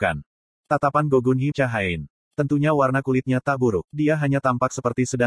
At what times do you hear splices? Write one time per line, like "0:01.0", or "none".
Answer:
0:01.5
0:03.9